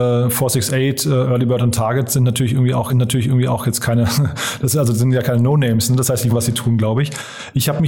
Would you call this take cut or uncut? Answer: cut